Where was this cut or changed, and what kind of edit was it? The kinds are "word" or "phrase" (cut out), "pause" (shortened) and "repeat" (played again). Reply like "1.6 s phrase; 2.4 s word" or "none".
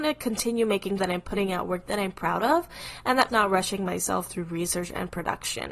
1.0 s word; 3.3 s word